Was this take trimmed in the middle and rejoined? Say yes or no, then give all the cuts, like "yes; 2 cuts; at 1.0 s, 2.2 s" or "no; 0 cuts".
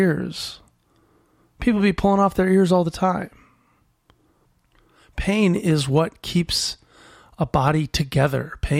no; 0 cuts